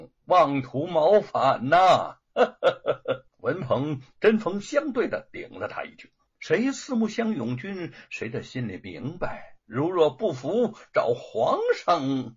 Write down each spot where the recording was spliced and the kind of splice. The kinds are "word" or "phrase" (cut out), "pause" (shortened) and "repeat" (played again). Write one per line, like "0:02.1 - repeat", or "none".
0:03.3 - pause
0:06.3 - pause
0:09.6 - pause

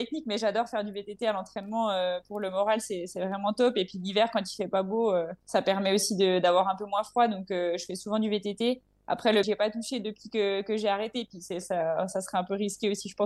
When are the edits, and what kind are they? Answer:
0:05.4 - pause
0:09.4 - word

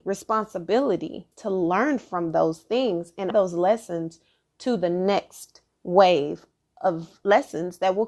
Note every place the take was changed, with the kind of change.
0:01.3 - word
0:03.3 - word

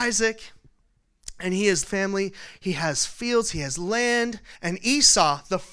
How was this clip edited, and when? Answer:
0:01.8 - phrase
0:04.6 - pause

